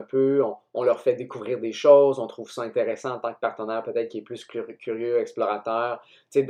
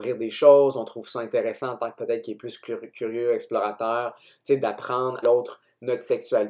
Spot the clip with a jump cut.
second; 2 cuts; at 2.0 s, 5.2 s

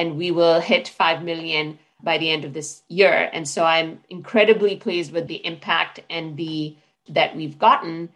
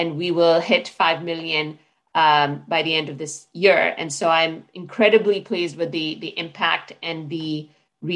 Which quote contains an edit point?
first; 3 cuts; at 2.0 s, 5.3 s, 7.1 s

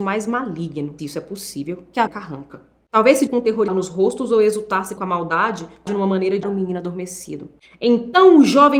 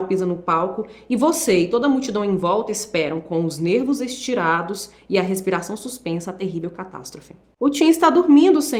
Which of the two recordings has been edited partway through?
first; 7 cuts; at 1.0 s, 2.1 s, 3.3 s, 3.7 s, 5.0 s, 5.9 s, 6.4 s

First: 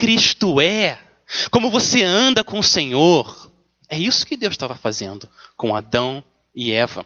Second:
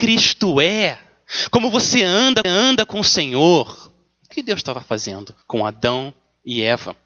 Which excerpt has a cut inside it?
second; 3 cuts; at 2.4 s, 4.3 s, 5.4 s

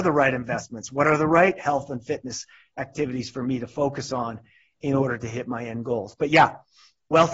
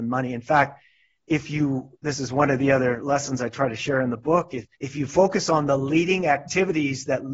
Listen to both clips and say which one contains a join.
second; 2 cuts; at 2.0 s, 4.7 s

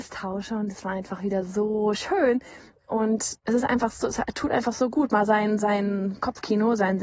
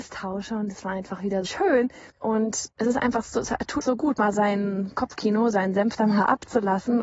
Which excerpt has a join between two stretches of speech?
second; 4 cuts; at 1.5 s, 2.1 s, 3.8 s, 4.3 s

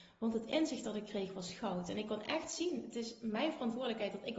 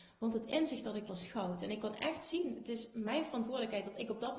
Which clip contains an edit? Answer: second; 1 cut; at 1.1 s

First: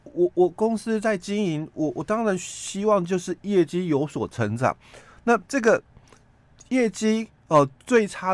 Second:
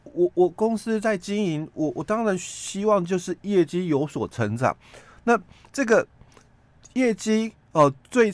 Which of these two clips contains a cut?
first; 1 cut; at 5.5 s

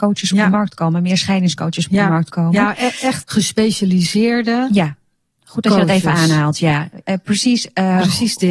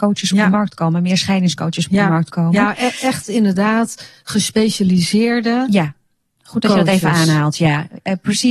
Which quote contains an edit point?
first; 1 cut; at 3.2 s

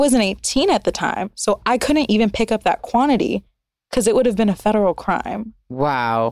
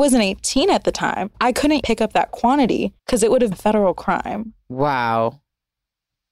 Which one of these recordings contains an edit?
second; 4 cuts; at 1.3 s, 1.8 s, 3.0 s, 3.5 s

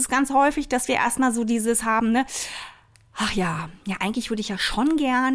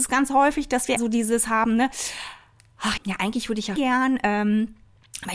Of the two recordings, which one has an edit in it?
second; 3 cuts; at 1.0 s, 3.0 s, 3.8 s

